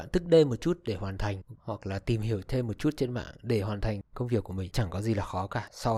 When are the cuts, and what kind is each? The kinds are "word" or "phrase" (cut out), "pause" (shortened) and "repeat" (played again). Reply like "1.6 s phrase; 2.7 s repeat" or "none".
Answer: 1.5 s phrase; 4.7 s word